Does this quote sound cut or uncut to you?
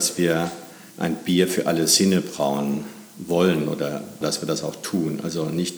cut